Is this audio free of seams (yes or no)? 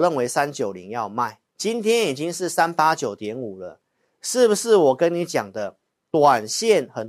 no